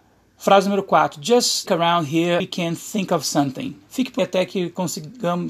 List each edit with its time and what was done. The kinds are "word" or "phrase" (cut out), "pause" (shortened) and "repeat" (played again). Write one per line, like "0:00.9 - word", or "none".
0:01.7 - word
0:02.4 - word
0:04.2 - word